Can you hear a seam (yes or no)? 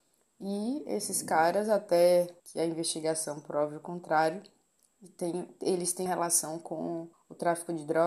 yes